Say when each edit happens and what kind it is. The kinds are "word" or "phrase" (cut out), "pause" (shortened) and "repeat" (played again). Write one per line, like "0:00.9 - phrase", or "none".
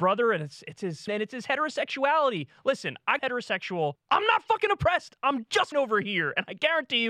0:01.1 - phrase
0:03.2 - phrase
0:04.0 - pause
0:05.7 - word